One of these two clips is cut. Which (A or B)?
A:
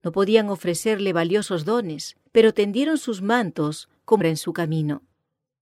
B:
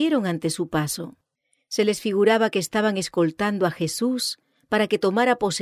A